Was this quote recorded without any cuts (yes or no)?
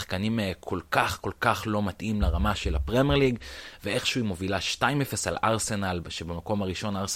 yes